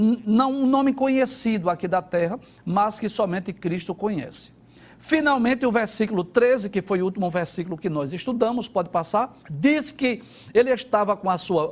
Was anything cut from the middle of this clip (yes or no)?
yes